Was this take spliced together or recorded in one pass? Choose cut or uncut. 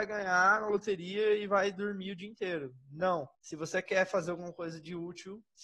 cut